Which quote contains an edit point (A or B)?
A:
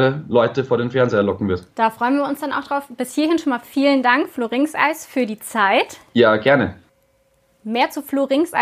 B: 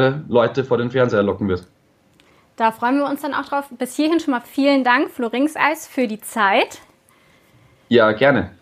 A